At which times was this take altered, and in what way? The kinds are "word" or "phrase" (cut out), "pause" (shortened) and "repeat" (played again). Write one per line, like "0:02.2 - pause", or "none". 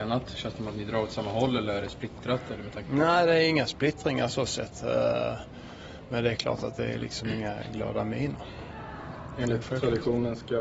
none